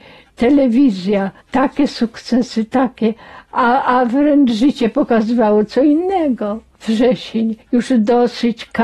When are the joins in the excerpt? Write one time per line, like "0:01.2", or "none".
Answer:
0:01.4
0:07.6